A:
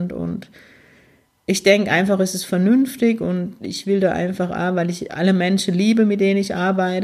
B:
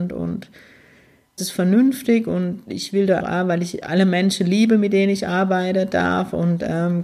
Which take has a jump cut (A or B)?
B